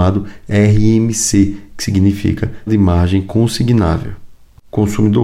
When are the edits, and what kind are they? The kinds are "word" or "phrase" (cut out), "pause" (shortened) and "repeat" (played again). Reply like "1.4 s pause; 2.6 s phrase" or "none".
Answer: 2.7 s word